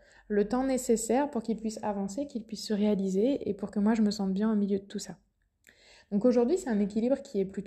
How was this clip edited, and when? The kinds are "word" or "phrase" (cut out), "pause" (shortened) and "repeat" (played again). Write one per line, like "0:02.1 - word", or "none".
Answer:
none